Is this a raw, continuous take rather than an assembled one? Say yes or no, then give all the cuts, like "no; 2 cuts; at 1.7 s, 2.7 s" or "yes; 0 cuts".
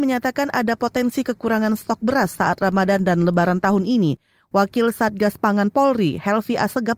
yes; 0 cuts